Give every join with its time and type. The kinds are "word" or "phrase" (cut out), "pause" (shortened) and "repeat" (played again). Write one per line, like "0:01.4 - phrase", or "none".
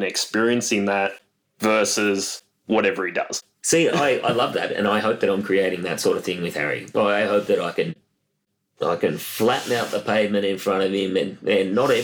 none